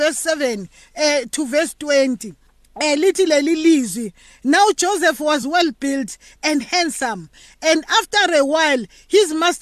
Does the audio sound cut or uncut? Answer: uncut